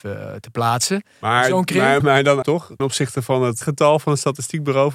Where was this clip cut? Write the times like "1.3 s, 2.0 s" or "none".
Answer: 2.0 s, 2.4 s, 2.8 s, 3.6 s

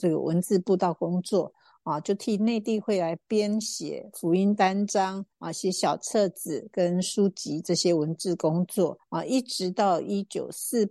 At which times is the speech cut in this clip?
5.3 s, 9.0 s

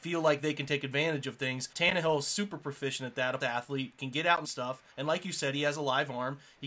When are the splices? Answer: 1.7 s, 3.4 s, 4.4 s, 4.9 s

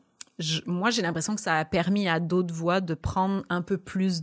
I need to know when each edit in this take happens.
none

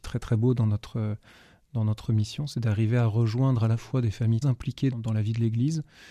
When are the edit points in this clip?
4.4 s, 4.9 s

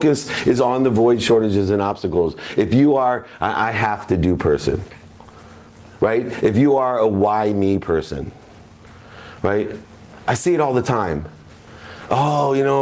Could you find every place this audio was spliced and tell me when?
none

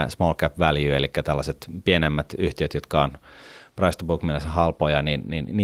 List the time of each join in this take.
none

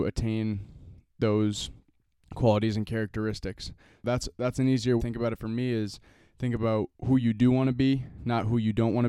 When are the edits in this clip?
5.0 s

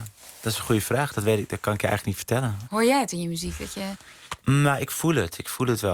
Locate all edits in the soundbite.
4.4 s

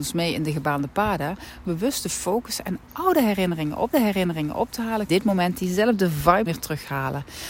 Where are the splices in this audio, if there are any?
1.6 s, 2.9 s, 3.9 s, 5.1 s, 6.5 s

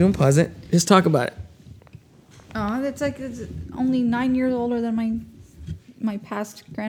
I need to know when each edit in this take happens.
none

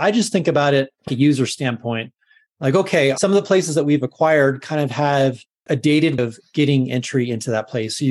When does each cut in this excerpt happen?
1.1 s, 5.7 s, 6.2 s

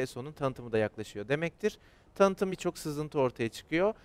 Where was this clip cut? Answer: 2.5 s

